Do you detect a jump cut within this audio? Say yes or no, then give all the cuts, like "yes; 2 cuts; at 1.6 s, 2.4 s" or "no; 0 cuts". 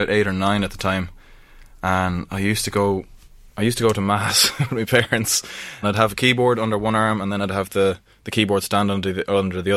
yes; 1 cut; at 5.8 s